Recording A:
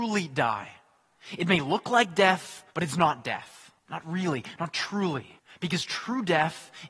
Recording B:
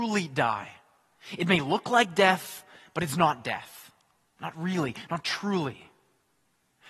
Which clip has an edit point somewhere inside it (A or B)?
A